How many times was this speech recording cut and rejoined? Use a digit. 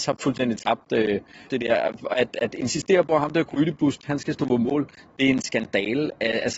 1